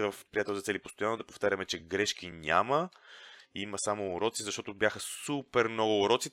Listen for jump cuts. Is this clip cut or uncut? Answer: uncut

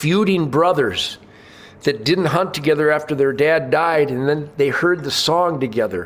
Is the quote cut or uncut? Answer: uncut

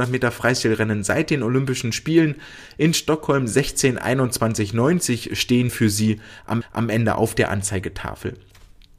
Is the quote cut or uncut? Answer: cut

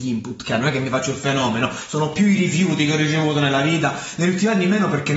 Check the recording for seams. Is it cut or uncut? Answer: uncut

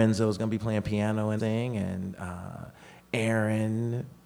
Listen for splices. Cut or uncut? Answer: cut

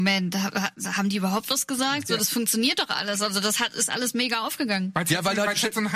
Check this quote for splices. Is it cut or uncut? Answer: uncut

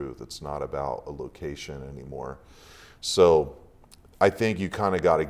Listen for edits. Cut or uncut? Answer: uncut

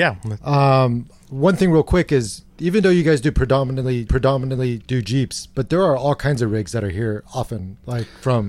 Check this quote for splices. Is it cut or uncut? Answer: cut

